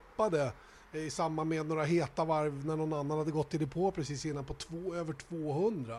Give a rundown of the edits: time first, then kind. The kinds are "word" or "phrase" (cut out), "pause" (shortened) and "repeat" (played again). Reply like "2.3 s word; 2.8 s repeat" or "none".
none